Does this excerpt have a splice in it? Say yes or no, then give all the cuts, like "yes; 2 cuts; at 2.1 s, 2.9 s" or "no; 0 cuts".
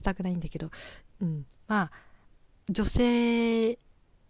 no; 0 cuts